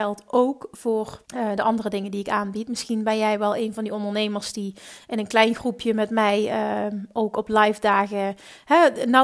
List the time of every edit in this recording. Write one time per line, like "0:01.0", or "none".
0:01.3